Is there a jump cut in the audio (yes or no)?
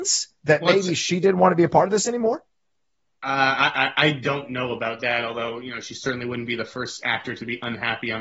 no